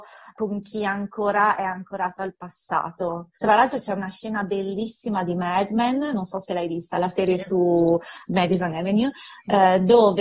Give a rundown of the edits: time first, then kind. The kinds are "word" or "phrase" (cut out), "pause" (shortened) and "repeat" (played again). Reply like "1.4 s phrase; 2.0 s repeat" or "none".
3.3 s pause